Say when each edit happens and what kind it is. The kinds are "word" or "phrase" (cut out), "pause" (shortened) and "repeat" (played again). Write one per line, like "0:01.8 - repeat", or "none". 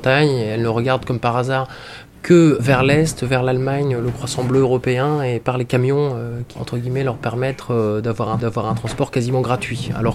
0:02.6 - word
0:06.5 - phrase
0:08.4 - repeat